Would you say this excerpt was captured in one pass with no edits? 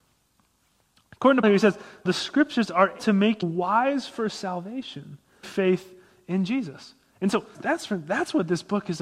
no; 6 cuts; at 1.4 s, 2.1 s, 3.0 s, 3.4 s, 5.4 s, 7.5 s

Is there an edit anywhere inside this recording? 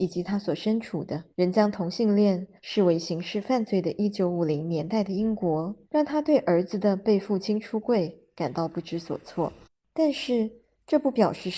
yes; 4 cuts; at 1.3 s, 2.6 s, 5.8 s, 9.6 s

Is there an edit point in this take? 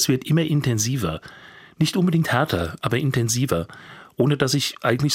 no; 0 cuts

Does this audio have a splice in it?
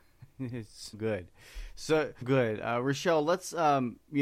yes; 2 cuts; at 0.9 s, 2.2 s

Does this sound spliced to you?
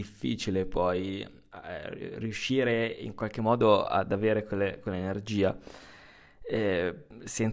no; 0 cuts

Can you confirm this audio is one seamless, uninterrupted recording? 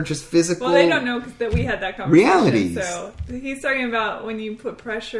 yes; 0 cuts

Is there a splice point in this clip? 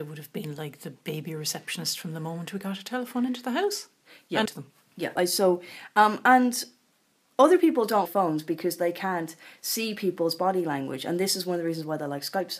yes; 4 cuts; at 4.5 s, 5.2 s, 7.1 s, 8.1 s

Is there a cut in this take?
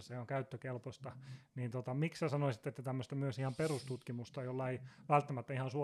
no; 0 cuts

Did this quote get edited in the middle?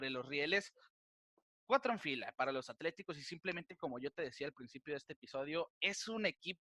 no; 0 cuts

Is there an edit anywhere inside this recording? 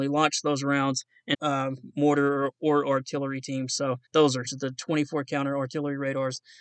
yes; 3 cuts; at 1.3 s, 4.1 s, 4.4 s

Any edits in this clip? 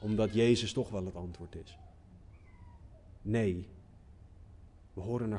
no; 0 cuts

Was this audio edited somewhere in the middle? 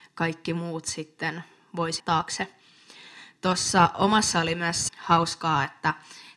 yes; 3 cuts; at 2.0 s, 4.3 s, 4.9 s

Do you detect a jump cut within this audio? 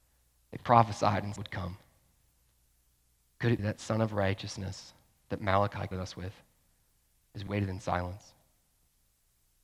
yes; 4 cuts; at 1.4 s, 3.6 s, 5.9 s, 7.5 s

